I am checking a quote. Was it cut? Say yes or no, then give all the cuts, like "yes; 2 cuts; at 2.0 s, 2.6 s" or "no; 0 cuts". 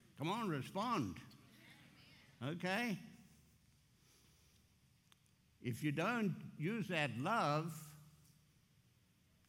no; 0 cuts